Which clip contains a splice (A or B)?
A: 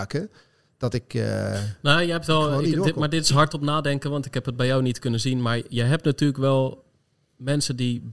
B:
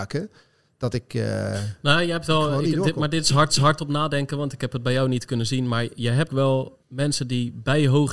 B